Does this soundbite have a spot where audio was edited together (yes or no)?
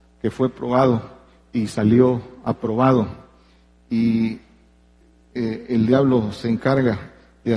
no